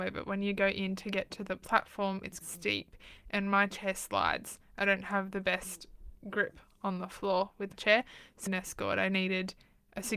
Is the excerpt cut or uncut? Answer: cut